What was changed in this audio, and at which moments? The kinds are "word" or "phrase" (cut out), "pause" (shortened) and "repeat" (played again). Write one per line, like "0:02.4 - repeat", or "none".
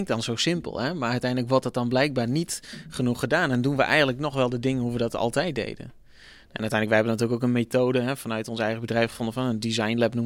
none